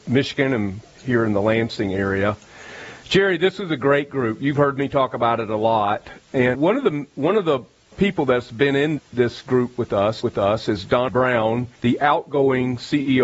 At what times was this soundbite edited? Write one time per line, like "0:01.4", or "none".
0:00.9
0:06.5
0:07.9
0:09.0
0:10.2
0:11.1
0:11.8

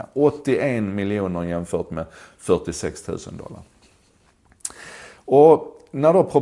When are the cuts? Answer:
none

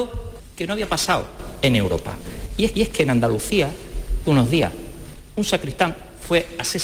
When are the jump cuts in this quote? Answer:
0:02.7
0:04.2

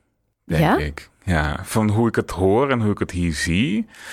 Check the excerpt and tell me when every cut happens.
none

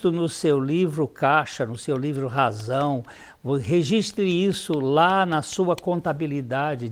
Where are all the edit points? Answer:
none

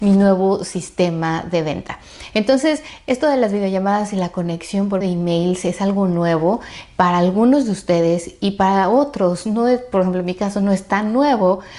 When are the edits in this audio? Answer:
0:05.0

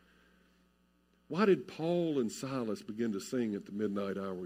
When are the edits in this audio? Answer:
none

